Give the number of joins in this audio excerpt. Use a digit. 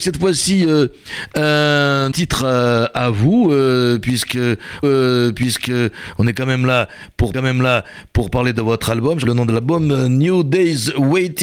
4